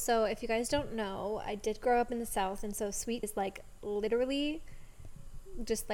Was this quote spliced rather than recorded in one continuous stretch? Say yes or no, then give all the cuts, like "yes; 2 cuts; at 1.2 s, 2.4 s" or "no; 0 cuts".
yes; 1 cut; at 3.2 s